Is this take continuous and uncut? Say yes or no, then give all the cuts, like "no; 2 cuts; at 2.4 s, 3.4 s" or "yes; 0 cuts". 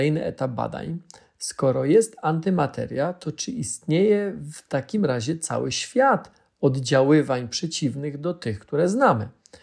yes; 0 cuts